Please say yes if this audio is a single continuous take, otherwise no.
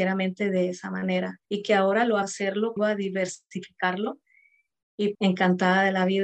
no